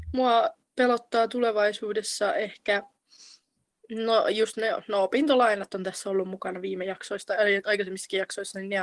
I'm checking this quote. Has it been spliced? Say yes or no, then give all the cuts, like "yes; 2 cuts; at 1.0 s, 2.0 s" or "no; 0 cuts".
no; 0 cuts